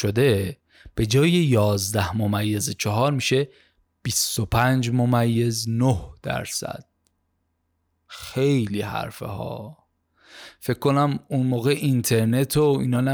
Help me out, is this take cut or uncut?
uncut